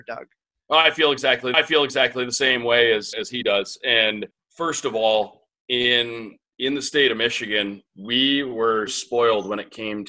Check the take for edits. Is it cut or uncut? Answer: cut